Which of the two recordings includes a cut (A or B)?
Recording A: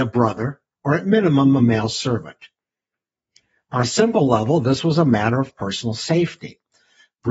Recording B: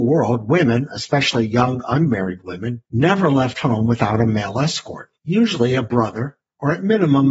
B